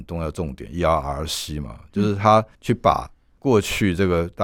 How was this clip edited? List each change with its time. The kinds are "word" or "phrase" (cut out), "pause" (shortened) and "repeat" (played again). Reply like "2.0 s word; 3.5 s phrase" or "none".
2.5 s pause